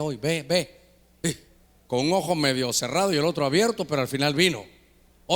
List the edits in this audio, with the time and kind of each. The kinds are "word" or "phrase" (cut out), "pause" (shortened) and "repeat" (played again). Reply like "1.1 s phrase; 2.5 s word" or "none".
none